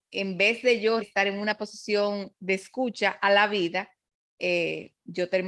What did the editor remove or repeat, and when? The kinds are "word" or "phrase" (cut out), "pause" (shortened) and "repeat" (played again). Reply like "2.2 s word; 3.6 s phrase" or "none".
1.0 s word

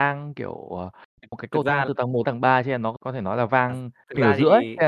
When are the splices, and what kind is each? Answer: 2.2 s word; 3.0 s word

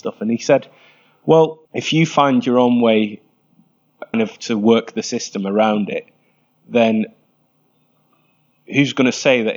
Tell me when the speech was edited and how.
1.6 s pause; 4.1 s word

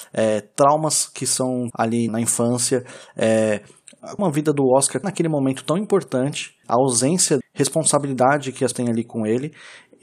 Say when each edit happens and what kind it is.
1.7 s word; 2.1 s word; 4.2 s word; 5.0 s word; 6.6 s word; 7.4 s word; 8.7 s word

